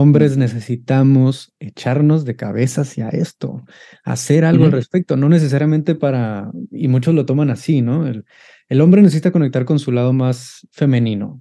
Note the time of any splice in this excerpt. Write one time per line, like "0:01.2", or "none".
none